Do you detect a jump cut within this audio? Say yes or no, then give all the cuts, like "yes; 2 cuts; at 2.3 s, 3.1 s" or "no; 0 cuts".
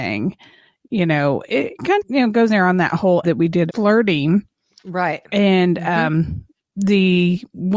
yes; 5 cuts; at 1.5 s, 2.0 s, 2.5 s, 3.2 s, 3.7 s